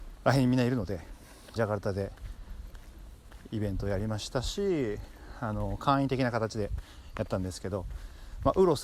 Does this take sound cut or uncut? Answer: cut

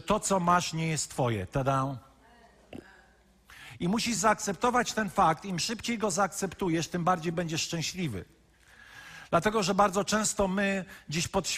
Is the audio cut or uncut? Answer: uncut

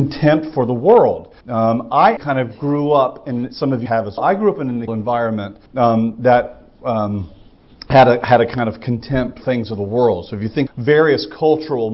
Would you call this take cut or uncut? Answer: cut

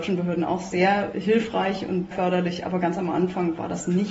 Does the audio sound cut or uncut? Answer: cut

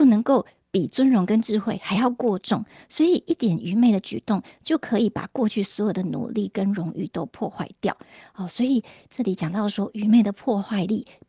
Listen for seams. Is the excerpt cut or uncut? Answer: uncut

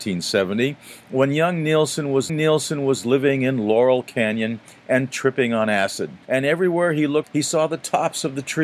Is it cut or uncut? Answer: cut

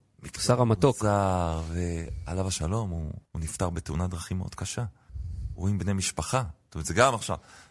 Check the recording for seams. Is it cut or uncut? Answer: cut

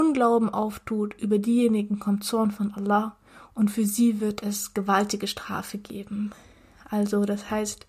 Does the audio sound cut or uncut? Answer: uncut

